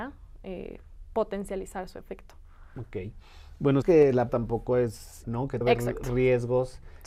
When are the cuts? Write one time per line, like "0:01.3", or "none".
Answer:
0:03.8
0:04.3
0:05.2
0:05.6